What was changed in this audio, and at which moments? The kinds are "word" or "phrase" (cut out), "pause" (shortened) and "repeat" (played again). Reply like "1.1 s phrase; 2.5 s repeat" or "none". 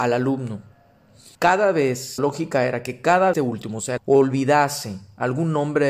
1.3 s pause; 2.2 s word; 3.3 s phrase; 4.0 s word